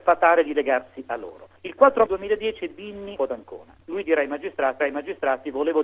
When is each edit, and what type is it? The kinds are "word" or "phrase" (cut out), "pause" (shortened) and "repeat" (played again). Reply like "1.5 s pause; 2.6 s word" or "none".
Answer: 2.1 s word; 3.2 s phrase; 4.8 s repeat